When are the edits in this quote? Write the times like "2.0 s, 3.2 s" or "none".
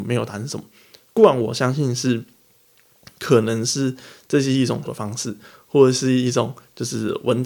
4.9 s